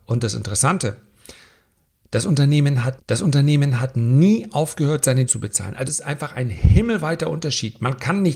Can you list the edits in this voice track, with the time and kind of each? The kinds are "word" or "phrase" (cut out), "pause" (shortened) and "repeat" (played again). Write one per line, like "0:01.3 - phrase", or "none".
0:03.0 - repeat
0:05.3 - word
0:05.9 - word